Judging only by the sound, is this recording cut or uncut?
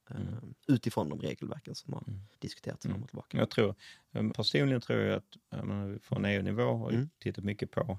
cut